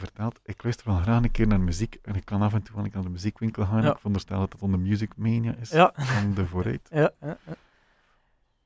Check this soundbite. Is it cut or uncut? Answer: uncut